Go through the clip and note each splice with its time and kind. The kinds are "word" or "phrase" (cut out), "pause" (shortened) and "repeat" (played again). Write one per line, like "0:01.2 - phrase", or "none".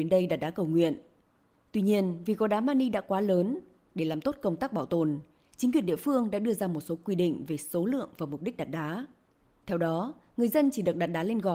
none